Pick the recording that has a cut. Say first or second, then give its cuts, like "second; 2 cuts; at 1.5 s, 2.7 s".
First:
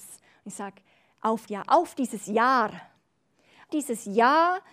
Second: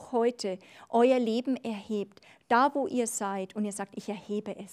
first; 2 cuts; at 1.5 s, 3.7 s